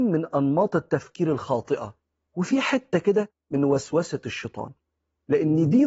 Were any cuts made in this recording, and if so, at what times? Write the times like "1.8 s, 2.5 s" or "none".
none